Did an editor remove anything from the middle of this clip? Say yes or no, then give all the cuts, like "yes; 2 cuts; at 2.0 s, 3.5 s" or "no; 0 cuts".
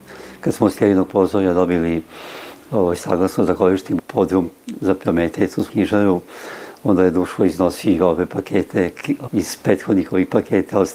yes; 4 cuts; at 4.0 s, 4.8 s, 5.7 s, 9.3 s